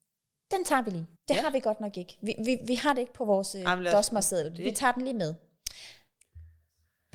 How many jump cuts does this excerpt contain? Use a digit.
1